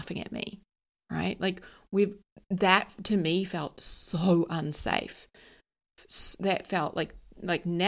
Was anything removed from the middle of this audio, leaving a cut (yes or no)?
no